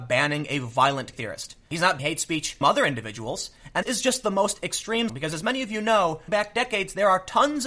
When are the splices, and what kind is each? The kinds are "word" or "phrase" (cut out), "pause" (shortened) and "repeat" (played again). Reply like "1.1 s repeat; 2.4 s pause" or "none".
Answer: 1.1 s word; 2.0 s word; 2.6 s word; 3.8 s word; 5.1 s word; 6.3 s word